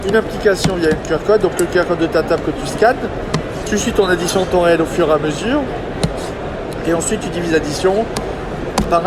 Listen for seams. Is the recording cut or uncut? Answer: uncut